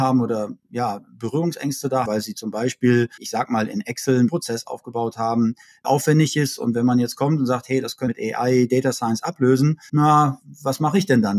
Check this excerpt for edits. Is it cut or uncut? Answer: cut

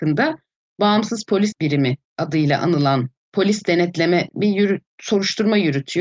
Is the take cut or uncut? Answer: cut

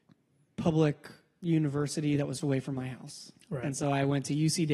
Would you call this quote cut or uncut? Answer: cut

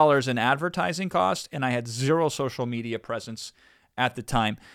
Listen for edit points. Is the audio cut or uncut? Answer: uncut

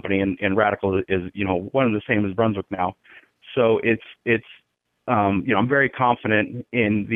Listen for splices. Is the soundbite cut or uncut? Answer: uncut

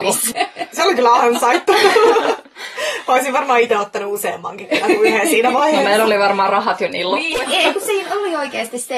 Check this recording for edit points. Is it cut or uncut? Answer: uncut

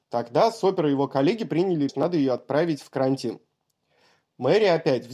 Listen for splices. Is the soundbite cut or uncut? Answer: cut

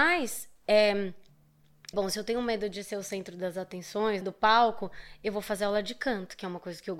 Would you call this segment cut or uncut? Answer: cut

